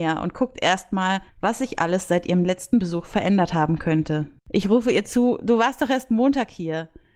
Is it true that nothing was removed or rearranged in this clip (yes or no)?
no